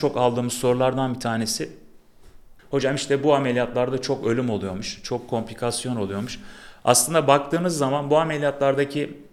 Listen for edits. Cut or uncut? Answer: cut